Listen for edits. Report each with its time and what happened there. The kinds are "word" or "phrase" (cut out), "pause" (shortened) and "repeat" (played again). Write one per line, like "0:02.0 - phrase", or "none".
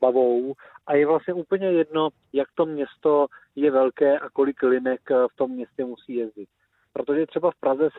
none

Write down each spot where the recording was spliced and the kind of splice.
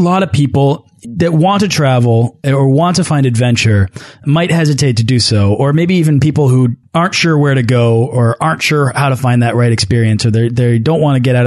none

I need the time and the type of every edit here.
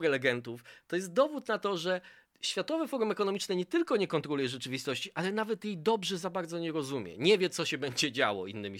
0:02.2 - pause

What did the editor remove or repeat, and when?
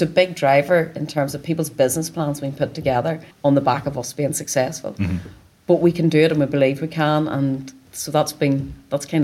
0:03.3 - pause

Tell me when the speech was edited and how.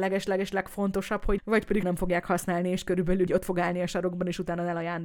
0:01.4 - word
0:01.8 - word
0:03.3 - word

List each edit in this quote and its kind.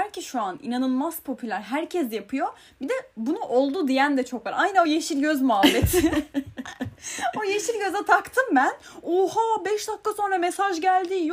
none

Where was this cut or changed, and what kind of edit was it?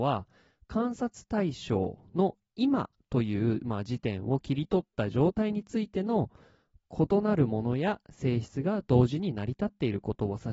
none

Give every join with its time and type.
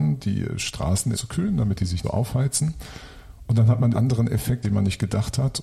0:01.1 - word
0:02.0 - word
0:03.9 - word
0:04.6 - word

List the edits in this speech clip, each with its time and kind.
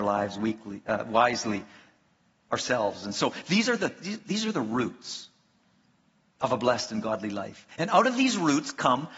none

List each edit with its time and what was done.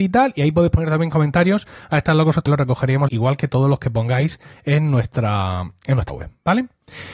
0:02.5 - phrase
0:03.1 - word
0:06.1 - word

